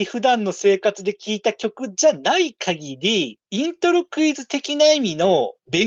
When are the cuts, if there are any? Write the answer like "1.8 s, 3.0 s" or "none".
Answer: 3.4 s